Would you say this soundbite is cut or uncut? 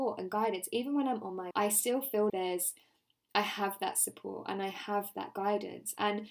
cut